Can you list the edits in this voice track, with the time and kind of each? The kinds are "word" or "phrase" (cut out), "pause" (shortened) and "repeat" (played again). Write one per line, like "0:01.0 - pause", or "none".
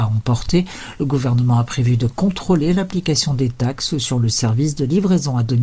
none

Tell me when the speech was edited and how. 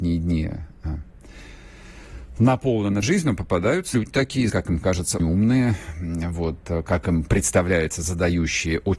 0:03.0 - phrase
0:03.9 - phrase
0:04.5 - word
0:05.2 - word

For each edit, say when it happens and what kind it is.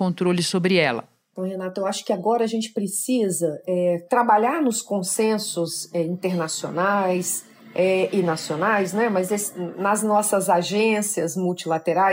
none

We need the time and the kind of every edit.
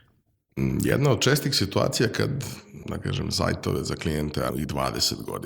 0:02.8 - word
0:04.5 - word

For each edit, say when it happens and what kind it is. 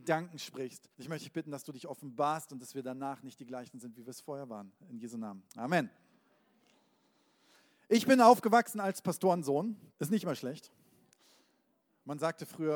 0:00.9 - pause
0:09.9 - pause

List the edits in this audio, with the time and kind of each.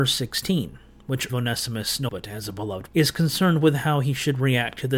0:01.3 - phrase
0:02.1 - phrase
0:02.9 - word

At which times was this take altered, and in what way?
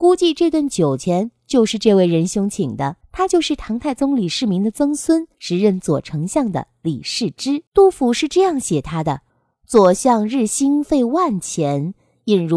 0:03.0 - pause
0:05.3 - pause
0:07.7 - pause
0:09.3 - pause

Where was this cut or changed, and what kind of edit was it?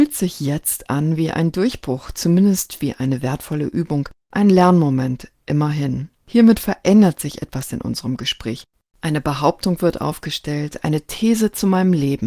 0:08.8 - pause

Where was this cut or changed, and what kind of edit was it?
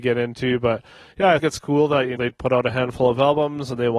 0:01.4 - word
0:02.2 - word

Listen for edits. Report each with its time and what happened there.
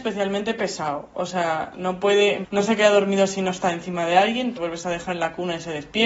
0:02.4 - word
0:04.6 - word

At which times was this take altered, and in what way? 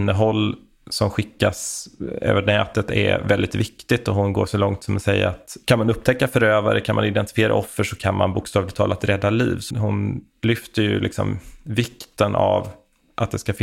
0:09.7 - word

